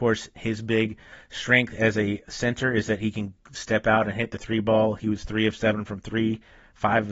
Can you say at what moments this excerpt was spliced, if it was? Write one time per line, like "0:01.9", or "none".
none